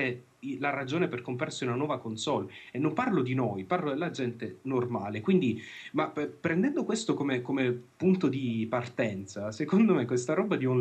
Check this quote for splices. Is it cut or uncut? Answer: uncut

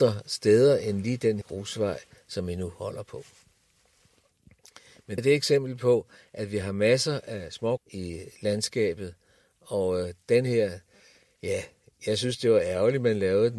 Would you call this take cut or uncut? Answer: cut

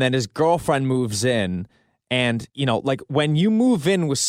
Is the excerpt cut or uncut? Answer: cut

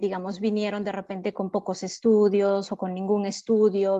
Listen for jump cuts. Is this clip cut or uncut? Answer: uncut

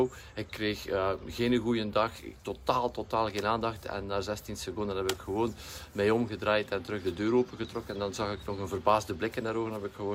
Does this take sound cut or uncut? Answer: uncut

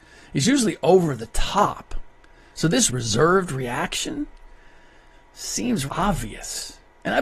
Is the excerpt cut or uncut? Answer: cut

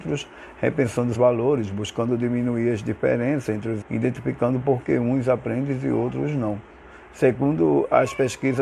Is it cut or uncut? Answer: cut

